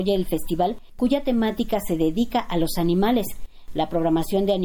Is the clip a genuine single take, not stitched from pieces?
yes; 0 cuts

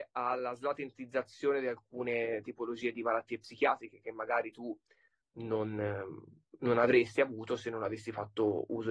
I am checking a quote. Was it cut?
no; 0 cuts

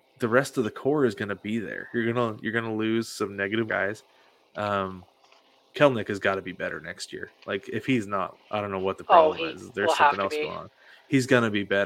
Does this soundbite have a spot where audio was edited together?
yes; 2 cuts; at 3.7 s, 8.3 s

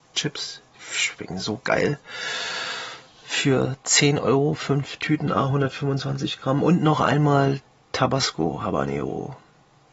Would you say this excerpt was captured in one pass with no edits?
yes; 0 cuts

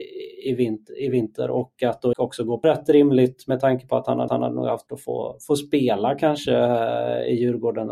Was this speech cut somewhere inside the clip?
yes; 4 cuts; at 2.1 s, 2.6 s, 4.3 s, 4.9 s

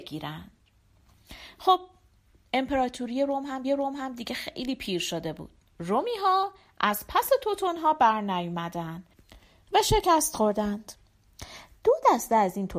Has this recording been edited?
yes; 1 cut; at 3.6 s

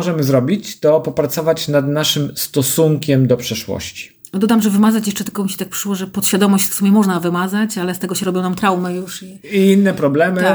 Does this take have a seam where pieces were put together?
yes; 1 cut; at 6.7 s

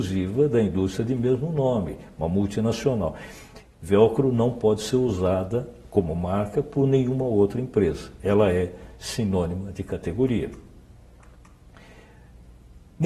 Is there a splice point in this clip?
no; 0 cuts

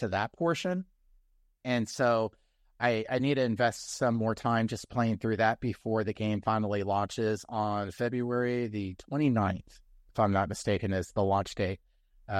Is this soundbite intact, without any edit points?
yes; 0 cuts

